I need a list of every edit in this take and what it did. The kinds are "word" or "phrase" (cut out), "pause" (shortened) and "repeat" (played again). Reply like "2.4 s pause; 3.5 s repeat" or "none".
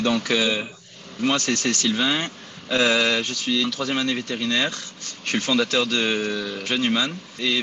1.2 s word; 1.5 s repeat; 3.6 s word; 6.7 s word